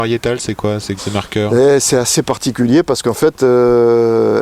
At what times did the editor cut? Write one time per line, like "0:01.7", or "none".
0:01.0